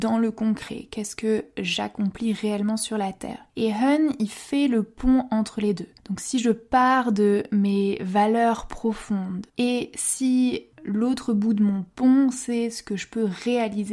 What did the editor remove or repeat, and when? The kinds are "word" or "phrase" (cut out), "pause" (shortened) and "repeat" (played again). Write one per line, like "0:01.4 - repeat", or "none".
0:03.5 - pause
0:06.0 - pause
0:09.5 - pause
0:10.7 - pause